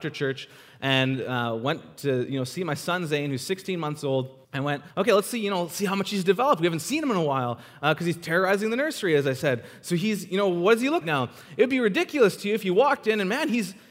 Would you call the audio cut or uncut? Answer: cut